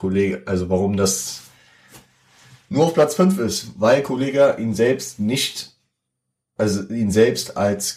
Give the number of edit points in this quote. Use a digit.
0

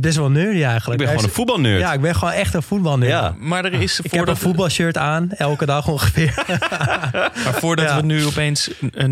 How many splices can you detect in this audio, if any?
0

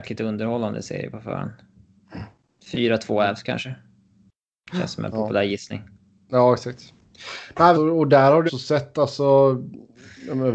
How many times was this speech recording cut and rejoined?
2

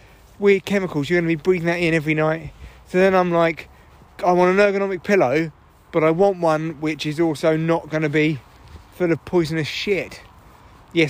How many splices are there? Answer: 0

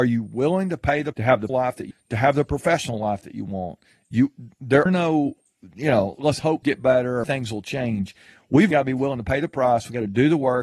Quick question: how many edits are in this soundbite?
8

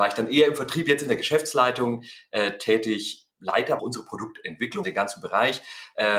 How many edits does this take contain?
3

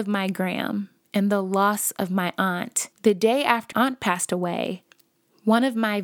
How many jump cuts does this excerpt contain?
2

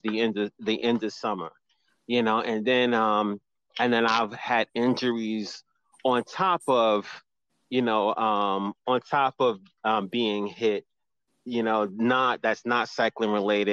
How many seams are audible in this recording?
0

